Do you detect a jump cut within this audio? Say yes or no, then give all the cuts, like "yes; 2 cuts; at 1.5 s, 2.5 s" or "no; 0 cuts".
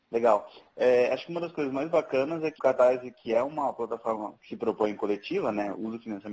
yes; 1 cut; at 2.6 s